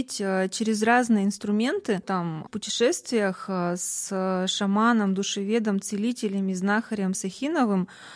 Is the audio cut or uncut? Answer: cut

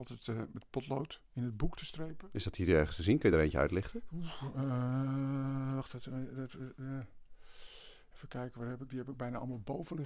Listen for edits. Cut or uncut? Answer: uncut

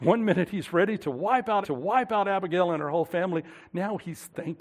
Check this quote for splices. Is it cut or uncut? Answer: cut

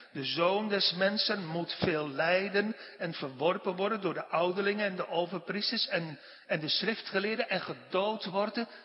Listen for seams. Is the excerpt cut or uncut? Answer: uncut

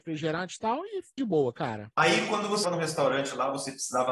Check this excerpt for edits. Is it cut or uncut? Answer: cut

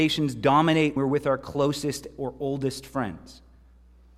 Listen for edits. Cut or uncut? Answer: cut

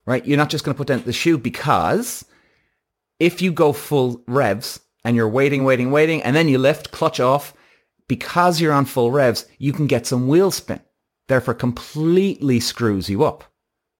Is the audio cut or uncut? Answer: uncut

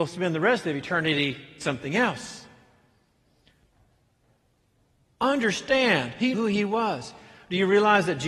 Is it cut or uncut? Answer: cut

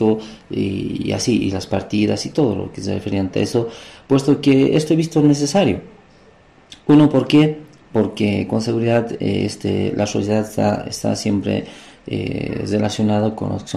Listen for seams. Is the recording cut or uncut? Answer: uncut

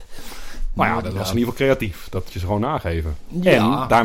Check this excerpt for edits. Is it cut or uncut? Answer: cut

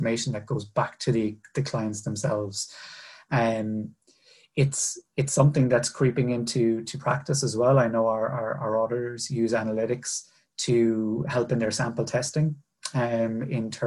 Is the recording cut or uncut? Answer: uncut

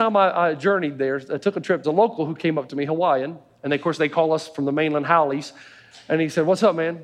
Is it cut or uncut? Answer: cut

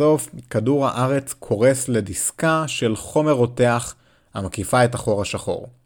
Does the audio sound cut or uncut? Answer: uncut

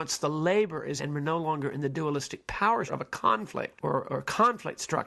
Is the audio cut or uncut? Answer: cut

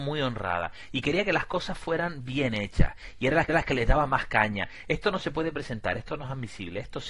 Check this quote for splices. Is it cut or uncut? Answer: cut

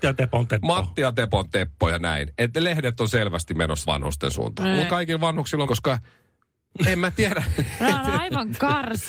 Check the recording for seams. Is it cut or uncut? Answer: cut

